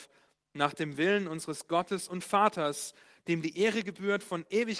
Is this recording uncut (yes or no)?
yes